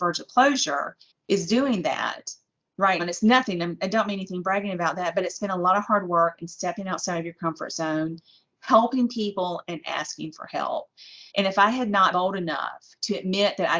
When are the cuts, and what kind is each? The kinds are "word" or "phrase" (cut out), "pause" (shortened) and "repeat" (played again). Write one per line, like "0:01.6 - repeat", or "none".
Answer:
0:01.1 - pause
0:03.0 - word
0:11.3 - pause
0:12.1 - word